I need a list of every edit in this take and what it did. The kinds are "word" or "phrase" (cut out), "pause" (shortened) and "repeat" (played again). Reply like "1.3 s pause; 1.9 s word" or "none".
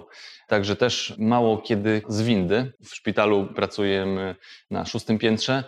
2.0 s word; 2.8 s pause